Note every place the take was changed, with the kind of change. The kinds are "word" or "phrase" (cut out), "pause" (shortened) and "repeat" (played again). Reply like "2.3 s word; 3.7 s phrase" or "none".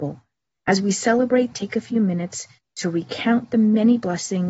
1.5 s phrase; 2.6 s pause